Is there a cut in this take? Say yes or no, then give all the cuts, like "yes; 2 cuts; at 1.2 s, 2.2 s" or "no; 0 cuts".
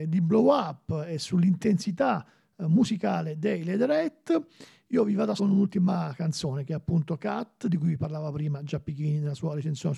yes; 1 cut; at 5.4 s